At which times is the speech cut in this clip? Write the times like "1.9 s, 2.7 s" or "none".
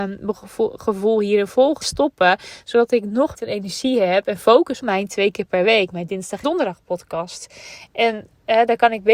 1.8 s, 3.4 s, 4.8 s, 6.4 s